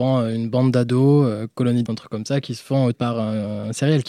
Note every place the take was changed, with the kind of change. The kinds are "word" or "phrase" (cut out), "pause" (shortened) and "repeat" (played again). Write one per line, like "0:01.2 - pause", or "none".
0:01.9 - word
0:02.9 - word